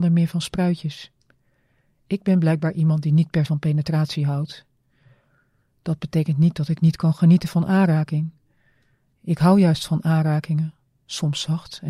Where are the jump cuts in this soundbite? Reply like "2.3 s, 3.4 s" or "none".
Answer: 3.5 s